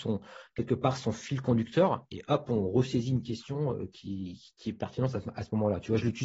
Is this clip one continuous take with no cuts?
yes; 0 cuts

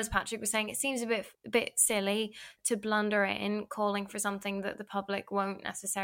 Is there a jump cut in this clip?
yes; 2 cuts; at 1.3 s, 2.6 s

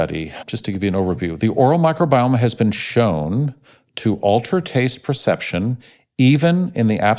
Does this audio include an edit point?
no; 0 cuts

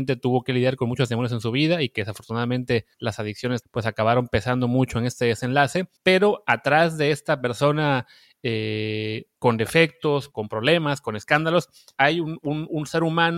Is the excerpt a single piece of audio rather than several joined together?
no; 6 cuts; at 2.9 s, 3.6 s, 6.0 s, 9.3 s, 10.3 s, 11.9 s

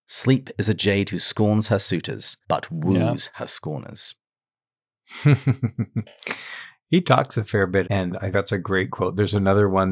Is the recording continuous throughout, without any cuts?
no; 3 cuts; at 2.4 s, 7.8 s, 8.3 s

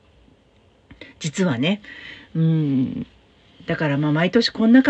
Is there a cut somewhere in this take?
no; 0 cuts

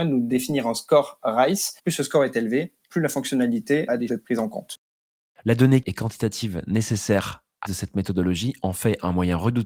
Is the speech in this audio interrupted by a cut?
yes; 4 cuts; at 1.8 s, 4.1 s, 5.8 s, 7.6 s

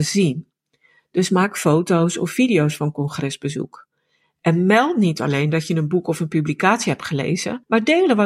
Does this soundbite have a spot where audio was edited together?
no; 0 cuts

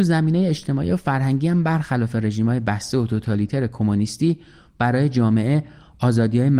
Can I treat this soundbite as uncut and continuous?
yes; 0 cuts

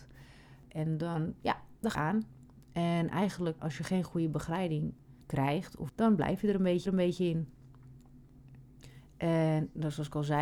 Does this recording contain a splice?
yes; 5 cuts; at 1.9 s, 3.6 s, 5.2 s, 5.9 s, 6.9 s

